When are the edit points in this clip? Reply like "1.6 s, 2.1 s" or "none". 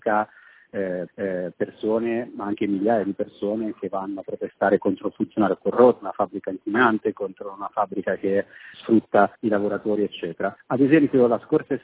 1.1 s, 6.0 s, 8.7 s, 9.4 s, 10.6 s

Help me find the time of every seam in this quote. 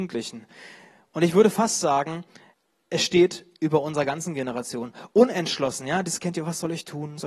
2.5 s

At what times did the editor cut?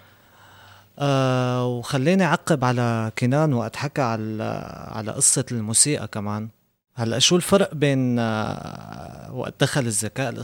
none

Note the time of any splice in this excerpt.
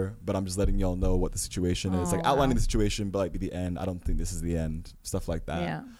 3.3 s

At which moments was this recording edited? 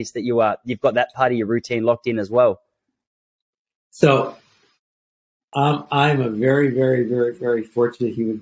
none

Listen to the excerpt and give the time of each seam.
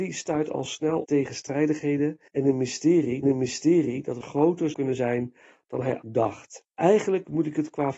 1.0 s, 2.3 s, 3.2 s, 4.2 s, 4.7 s, 6.0 s, 6.7 s

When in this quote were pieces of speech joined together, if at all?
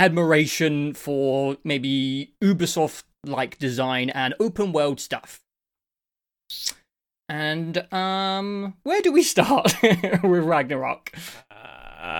none

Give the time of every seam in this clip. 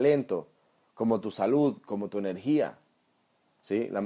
none

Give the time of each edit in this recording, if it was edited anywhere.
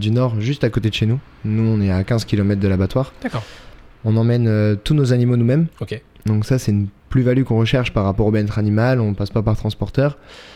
5.7 s, 7.0 s

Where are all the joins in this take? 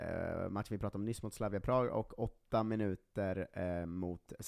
none

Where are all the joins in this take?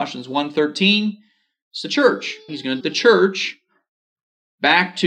2.5 s, 2.8 s

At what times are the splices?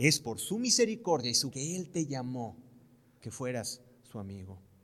1.5 s, 3.2 s

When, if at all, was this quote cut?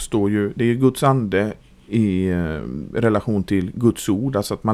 none

